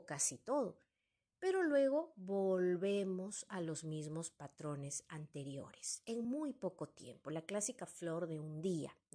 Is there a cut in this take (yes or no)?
no